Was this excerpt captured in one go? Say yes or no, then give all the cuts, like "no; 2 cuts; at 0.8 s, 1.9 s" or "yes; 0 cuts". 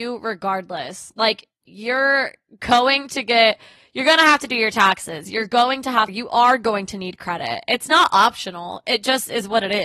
no; 1 cut; at 6.1 s